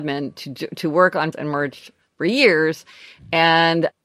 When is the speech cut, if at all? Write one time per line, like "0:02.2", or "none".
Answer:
0:01.3